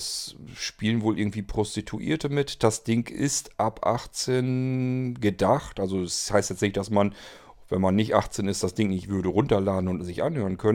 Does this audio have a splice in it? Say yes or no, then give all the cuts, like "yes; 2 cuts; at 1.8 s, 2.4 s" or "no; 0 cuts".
no; 0 cuts